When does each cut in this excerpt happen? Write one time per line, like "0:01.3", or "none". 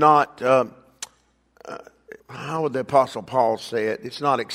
0:02.2